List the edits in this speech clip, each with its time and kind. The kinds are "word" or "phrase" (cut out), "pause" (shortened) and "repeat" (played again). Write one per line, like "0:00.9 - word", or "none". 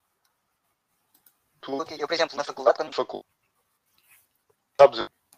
0:01.9 - word
0:02.9 - phrase